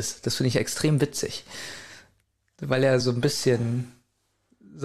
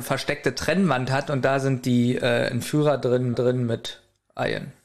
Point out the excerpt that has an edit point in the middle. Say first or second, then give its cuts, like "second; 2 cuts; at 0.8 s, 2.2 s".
second; 1 cut; at 3.3 s